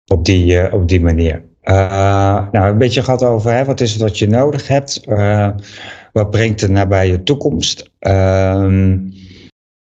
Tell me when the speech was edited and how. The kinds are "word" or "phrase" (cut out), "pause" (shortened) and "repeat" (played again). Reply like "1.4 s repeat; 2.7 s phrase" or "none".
none